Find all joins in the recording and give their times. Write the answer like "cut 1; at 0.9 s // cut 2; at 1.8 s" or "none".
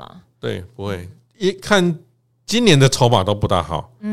none